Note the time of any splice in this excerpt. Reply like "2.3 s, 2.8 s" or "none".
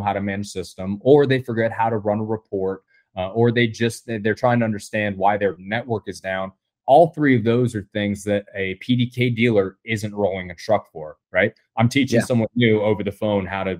none